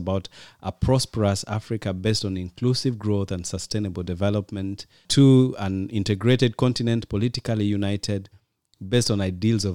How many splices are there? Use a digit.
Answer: 0